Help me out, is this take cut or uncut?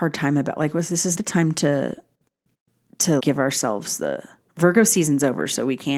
cut